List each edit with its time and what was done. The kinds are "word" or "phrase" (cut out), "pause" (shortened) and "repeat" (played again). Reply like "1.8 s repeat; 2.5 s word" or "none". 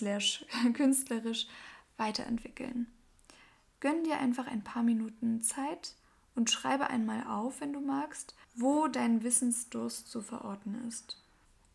8.4 s pause